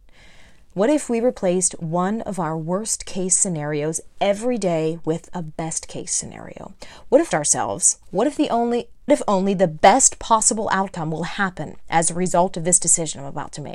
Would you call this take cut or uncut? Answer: cut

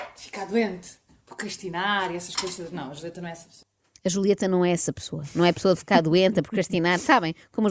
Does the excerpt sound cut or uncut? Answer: uncut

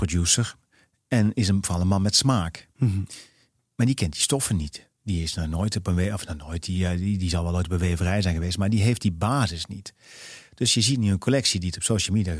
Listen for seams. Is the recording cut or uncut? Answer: cut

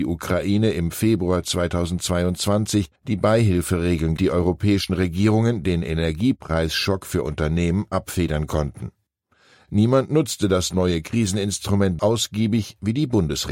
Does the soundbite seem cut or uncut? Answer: cut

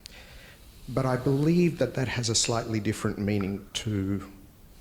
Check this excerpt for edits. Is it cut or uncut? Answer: cut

